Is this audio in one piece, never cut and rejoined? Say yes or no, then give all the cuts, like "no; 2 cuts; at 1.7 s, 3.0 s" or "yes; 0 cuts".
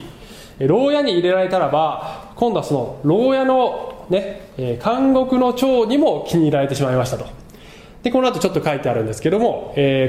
yes; 0 cuts